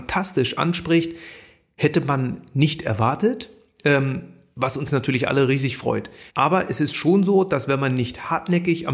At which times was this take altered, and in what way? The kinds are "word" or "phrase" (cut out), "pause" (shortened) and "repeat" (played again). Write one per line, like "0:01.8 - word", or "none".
0:06.3 - pause